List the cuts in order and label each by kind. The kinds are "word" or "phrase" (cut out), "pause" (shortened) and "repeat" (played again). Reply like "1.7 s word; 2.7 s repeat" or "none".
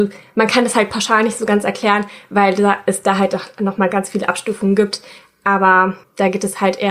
none